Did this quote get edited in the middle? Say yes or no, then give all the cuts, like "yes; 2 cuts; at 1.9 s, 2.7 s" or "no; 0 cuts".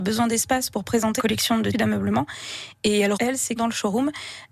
yes; 4 cuts; at 1.2 s, 1.7 s, 3.1 s, 3.6 s